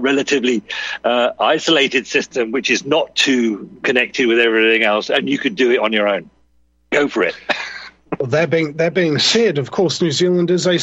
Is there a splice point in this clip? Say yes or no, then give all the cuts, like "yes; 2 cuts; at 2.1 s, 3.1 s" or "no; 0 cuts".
no; 0 cuts